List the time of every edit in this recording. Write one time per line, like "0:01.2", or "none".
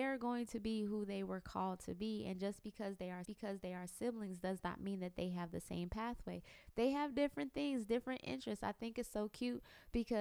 0:03.2